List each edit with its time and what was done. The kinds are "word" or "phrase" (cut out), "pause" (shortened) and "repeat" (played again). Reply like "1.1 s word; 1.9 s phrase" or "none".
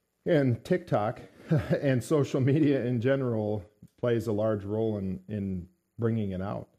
none